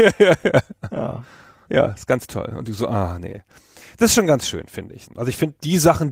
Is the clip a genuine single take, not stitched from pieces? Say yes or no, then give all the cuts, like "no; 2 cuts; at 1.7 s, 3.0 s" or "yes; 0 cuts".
yes; 0 cuts